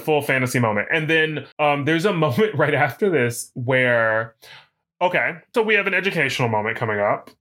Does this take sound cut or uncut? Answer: cut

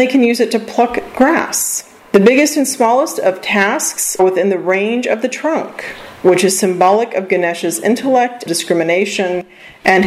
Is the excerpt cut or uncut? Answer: cut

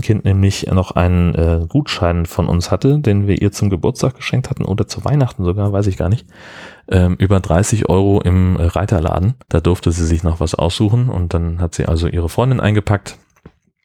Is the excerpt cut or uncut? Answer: cut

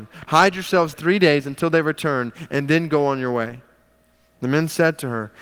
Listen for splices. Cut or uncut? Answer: cut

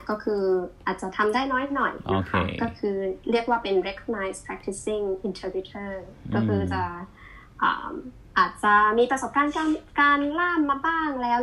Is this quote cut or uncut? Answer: uncut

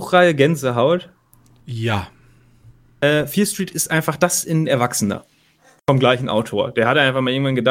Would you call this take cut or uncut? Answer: uncut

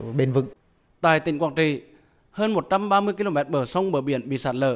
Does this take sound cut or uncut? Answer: uncut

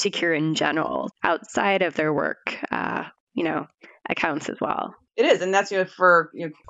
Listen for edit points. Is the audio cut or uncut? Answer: cut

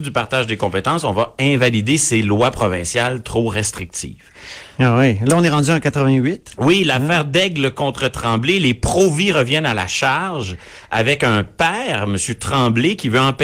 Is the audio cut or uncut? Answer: uncut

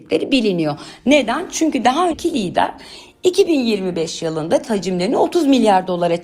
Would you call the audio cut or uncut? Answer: cut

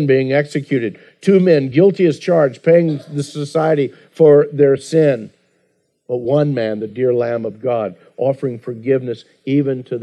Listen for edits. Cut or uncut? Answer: uncut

